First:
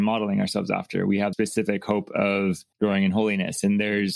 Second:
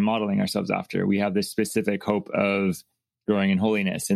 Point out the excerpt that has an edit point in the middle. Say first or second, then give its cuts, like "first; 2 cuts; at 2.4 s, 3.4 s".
first; 2 cuts; at 1.3 s, 2.7 s